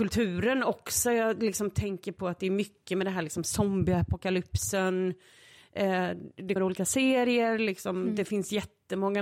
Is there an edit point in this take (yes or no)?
yes